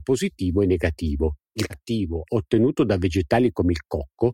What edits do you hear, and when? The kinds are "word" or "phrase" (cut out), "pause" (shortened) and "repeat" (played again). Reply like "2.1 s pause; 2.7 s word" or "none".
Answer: 1.7 s word; 2.3 s word